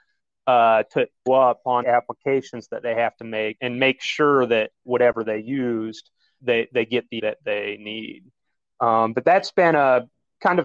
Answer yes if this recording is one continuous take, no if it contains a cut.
no